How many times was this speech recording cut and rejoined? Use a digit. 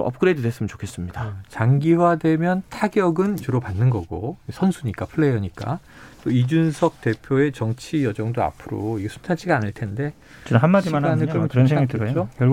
1